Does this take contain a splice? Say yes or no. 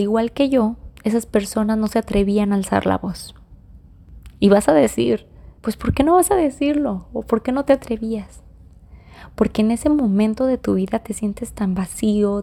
yes